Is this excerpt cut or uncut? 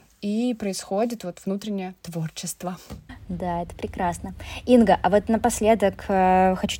uncut